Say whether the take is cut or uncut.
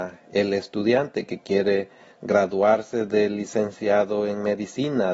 uncut